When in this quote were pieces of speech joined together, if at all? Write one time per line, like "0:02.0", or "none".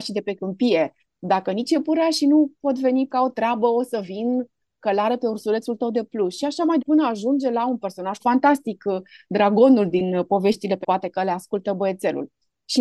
0:03.1
0:06.8
0:08.2
0:10.8